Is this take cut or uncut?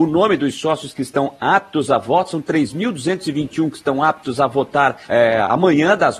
cut